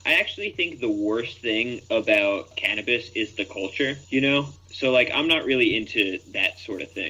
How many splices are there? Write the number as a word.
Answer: one